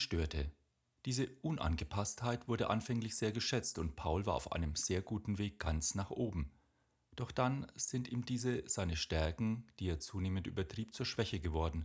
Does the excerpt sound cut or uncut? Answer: uncut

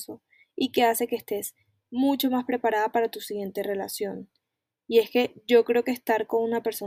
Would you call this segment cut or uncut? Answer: uncut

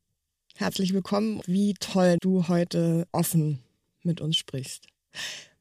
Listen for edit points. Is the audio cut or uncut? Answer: cut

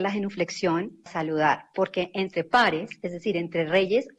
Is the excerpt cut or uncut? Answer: cut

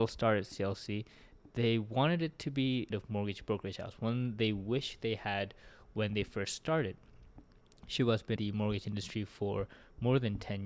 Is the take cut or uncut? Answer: cut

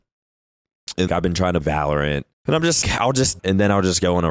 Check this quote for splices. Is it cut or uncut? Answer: cut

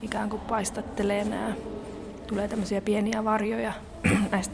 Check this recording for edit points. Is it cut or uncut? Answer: uncut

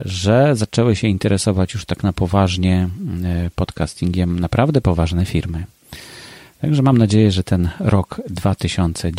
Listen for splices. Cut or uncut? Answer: uncut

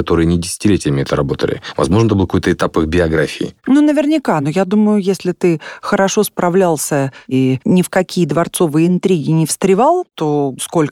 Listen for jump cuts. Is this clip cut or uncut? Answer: uncut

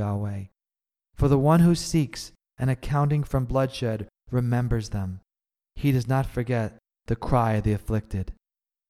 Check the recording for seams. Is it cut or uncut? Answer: uncut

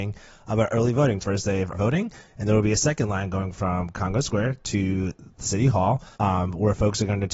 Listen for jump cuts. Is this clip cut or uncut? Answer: cut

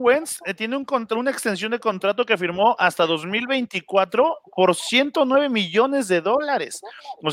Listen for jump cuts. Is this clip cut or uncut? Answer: uncut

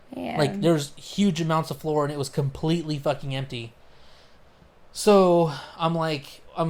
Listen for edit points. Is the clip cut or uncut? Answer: uncut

